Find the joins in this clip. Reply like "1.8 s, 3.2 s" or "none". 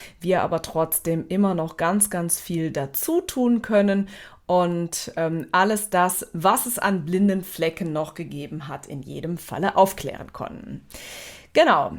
none